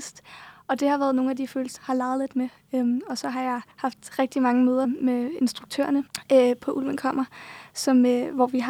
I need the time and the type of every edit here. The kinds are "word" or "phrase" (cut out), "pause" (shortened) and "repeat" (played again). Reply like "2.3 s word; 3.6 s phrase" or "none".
1.8 s word; 3.7 s pause; 4.8 s word